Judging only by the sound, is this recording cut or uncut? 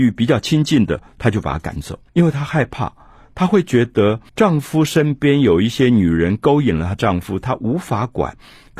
cut